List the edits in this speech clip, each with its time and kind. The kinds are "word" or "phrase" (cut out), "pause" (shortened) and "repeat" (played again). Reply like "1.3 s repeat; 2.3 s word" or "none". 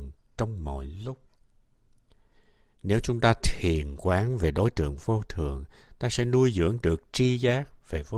none